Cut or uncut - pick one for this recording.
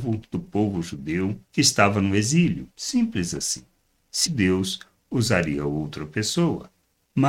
cut